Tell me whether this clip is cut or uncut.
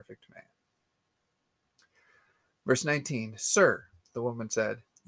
uncut